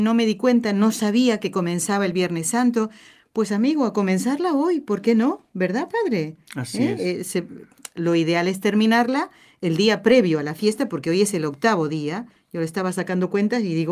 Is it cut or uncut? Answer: uncut